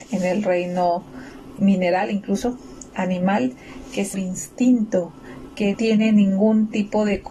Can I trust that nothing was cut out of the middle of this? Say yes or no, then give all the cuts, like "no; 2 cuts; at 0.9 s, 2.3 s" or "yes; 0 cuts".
no; 4 cuts; at 1.6 s, 2.9 s, 4.1 s, 5.7 s